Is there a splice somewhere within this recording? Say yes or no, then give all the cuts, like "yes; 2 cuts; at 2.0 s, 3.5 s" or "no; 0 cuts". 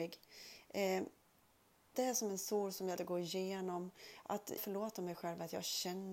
yes; 3 cuts; at 1.9 s, 3.0 s, 4.6 s